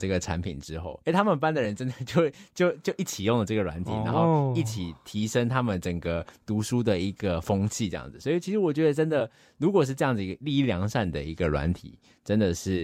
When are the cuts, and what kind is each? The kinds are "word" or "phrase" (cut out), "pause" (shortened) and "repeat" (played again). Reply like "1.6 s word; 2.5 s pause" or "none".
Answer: 1.0 s pause